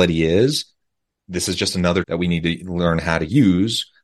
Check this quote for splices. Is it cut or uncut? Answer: cut